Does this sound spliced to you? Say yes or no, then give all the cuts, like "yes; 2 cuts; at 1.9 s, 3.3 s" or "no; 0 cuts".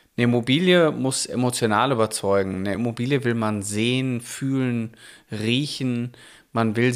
no; 0 cuts